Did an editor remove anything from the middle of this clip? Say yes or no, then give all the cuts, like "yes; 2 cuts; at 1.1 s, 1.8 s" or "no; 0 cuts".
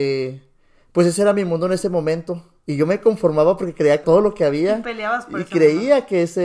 yes; 1 cut; at 4.0 s